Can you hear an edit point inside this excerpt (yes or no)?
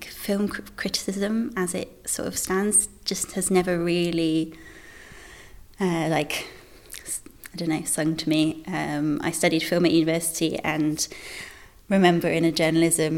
no